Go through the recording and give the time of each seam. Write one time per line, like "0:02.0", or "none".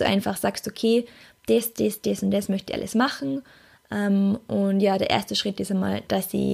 none